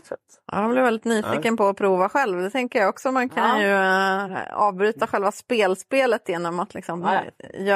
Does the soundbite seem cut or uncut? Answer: uncut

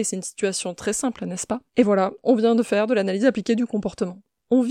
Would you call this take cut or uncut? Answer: cut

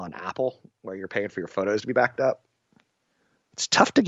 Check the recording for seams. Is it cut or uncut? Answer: uncut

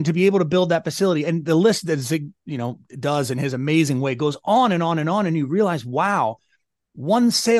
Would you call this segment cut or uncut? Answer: uncut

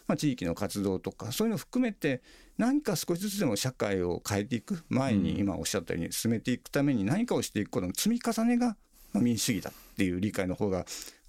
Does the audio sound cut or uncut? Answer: uncut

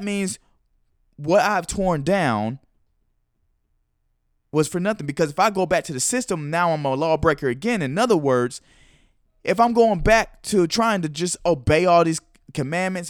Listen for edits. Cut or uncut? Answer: uncut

